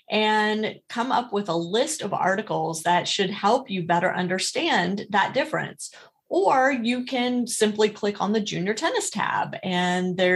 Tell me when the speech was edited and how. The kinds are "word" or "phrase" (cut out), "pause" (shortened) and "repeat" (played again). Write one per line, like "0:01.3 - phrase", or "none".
none

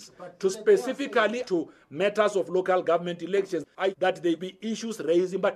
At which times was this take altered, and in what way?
0:01.4 - word
0:03.9 - word
0:04.4 - word

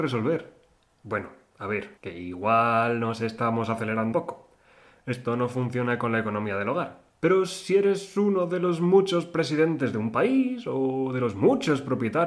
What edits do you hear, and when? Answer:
0:02.0 - pause
0:04.1 - word
0:07.1 - pause

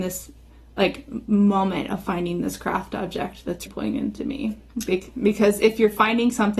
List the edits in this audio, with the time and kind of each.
0:03.7 - word

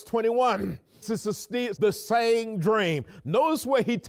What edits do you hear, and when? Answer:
0:01.0 - word
0:01.8 - word

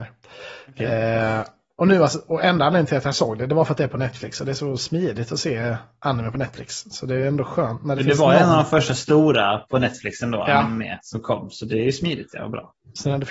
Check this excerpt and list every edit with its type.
none

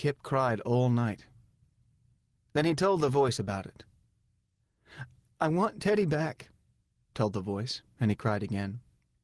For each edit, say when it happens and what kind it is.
0:07.1 - word

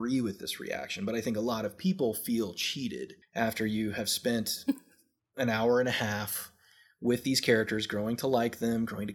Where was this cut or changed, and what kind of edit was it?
0:03.2 - pause

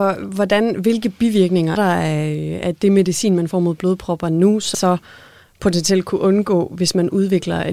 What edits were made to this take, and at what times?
0:01.8 - word
0:04.7 - word

